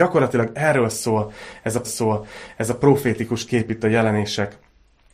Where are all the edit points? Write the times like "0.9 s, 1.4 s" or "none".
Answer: 1.8 s